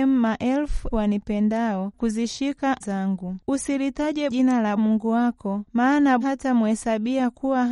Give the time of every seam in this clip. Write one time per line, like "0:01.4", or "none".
0:00.9
0:01.9
0:02.8
0:04.3
0:04.8
0:06.2